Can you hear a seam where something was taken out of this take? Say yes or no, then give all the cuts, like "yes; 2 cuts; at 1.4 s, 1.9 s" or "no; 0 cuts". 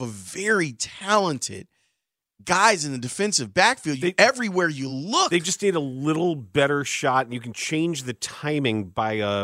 no; 0 cuts